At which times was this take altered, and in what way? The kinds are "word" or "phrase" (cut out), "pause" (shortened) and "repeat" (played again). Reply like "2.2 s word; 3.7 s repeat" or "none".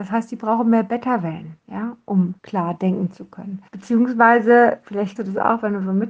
1.6 s pause; 2.4 s pause; 3.7 s pause; 5.2 s word